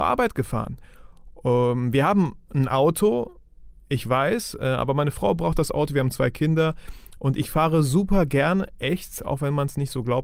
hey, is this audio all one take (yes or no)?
yes